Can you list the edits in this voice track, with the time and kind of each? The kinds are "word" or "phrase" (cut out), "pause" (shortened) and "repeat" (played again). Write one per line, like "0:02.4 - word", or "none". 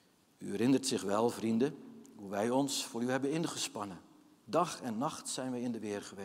none